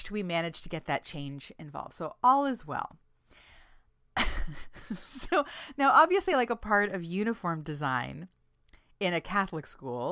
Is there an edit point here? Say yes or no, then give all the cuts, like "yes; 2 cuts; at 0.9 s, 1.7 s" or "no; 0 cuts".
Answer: no; 0 cuts